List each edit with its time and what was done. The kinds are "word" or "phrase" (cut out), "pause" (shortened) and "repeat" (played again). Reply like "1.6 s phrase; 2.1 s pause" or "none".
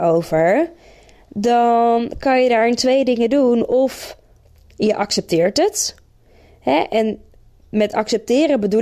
none

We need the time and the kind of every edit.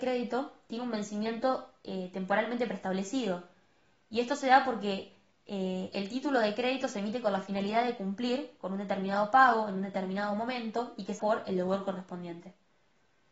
11.2 s phrase

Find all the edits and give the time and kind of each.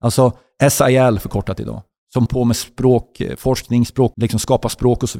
2.3 s word; 4.1 s word

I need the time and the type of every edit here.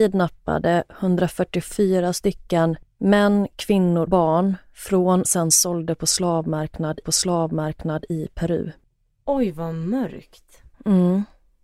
4.1 s word; 5.2 s phrase; 7.0 s repeat; 8.9 s pause; 10.7 s pause

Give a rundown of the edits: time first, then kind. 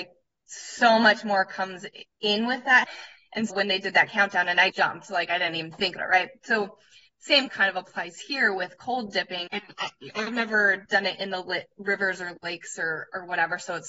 2.8 s word; 3.5 s word; 4.7 s word; 6.0 s word; 7.5 s word; 9.5 s word

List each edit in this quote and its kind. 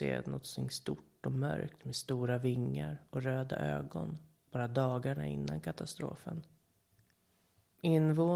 none

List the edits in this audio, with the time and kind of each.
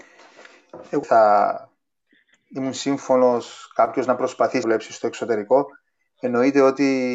1.0 s phrase; 4.6 s word

